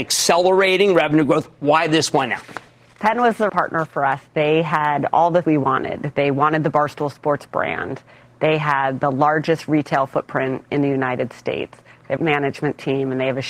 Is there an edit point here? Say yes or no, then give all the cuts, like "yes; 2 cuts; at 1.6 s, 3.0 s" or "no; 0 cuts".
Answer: yes; 4 cuts; at 2.9 s, 3.5 s, 5.4 s, 12.2 s